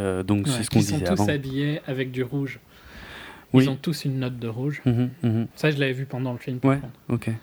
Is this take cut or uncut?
cut